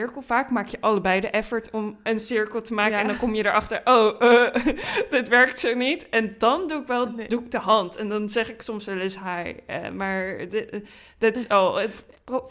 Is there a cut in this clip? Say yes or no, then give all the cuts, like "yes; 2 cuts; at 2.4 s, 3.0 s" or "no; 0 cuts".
no; 0 cuts